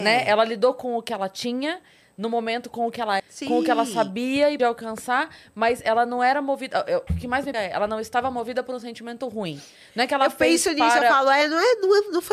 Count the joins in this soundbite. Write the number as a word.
four